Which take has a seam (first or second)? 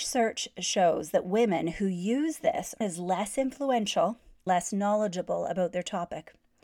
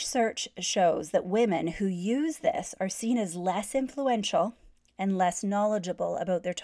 first